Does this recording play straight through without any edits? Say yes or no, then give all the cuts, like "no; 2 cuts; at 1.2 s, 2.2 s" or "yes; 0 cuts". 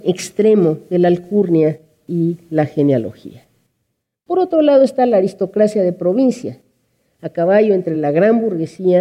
yes; 0 cuts